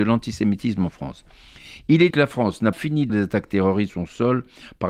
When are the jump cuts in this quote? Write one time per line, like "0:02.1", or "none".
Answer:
0:02.1
0:02.7
0:03.1
0:03.9